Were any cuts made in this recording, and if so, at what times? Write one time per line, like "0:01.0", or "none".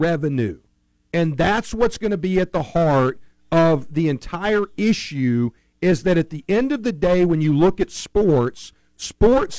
none